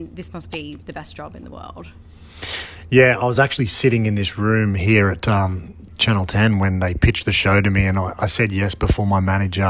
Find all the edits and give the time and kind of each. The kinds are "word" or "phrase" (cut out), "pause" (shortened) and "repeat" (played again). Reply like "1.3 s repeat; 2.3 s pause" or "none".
none